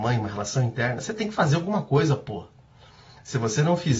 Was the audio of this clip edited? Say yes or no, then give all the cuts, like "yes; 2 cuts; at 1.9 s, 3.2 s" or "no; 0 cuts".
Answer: no; 0 cuts